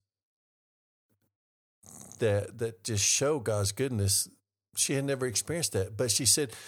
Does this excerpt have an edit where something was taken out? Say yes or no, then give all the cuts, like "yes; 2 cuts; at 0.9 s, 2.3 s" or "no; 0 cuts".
no; 0 cuts